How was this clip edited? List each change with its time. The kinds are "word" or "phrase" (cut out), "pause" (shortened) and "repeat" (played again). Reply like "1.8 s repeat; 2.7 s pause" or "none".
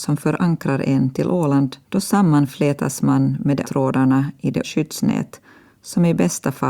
1.8 s pause; 3.6 s word; 4.6 s word

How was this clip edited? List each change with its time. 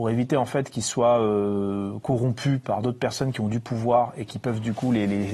none

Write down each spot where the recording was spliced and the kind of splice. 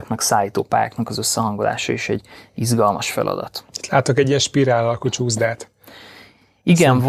none

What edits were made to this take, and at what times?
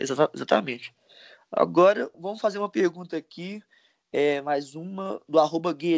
none

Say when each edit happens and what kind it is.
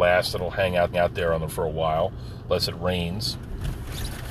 0.9 s repeat; 1.5 s word

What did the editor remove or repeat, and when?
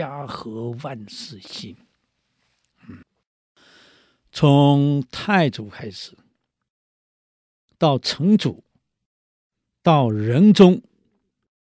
3.0 s pause

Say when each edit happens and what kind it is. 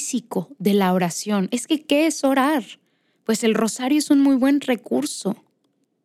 none

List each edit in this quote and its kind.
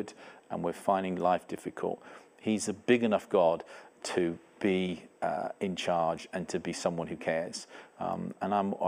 5.2 s pause

